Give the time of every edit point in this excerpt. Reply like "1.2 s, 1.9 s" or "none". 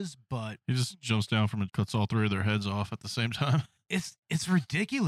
1.7 s